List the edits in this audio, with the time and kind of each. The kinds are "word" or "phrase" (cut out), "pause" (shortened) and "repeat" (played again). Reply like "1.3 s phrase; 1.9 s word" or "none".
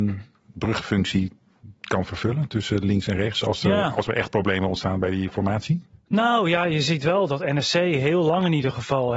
none